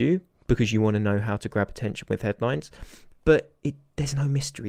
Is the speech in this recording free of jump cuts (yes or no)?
yes